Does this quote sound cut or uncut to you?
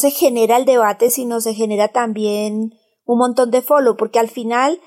uncut